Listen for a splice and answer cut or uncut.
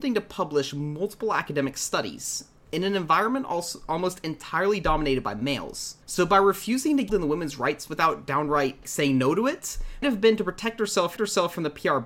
cut